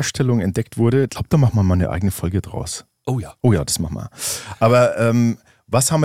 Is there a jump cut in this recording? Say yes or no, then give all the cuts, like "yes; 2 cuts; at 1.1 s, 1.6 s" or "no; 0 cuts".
yes; 1 cut; at 1.1 s